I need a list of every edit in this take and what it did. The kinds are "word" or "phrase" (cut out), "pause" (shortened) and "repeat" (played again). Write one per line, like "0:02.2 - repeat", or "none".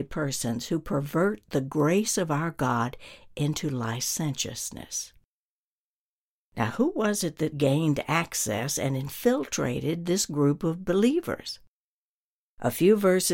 0:07.5 - word